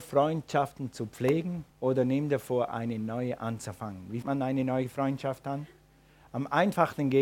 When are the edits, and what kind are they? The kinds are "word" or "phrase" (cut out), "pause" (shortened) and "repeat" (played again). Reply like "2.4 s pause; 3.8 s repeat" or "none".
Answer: 1.7 s pause; 4.2 s word